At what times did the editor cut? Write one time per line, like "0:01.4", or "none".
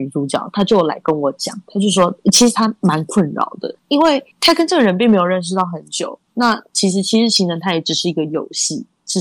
0:03.8
0:04.3